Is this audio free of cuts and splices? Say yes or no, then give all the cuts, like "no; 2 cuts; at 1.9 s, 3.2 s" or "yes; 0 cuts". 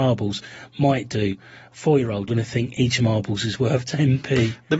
no; 2 cuts; at 2.3 s, 3.0 s